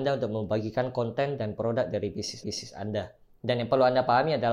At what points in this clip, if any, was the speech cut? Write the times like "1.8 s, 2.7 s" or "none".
2.4 s